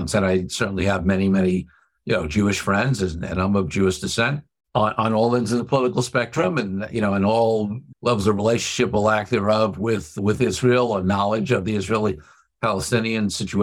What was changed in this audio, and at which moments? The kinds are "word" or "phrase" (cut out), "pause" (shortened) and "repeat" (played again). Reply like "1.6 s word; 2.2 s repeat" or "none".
4.6 s pause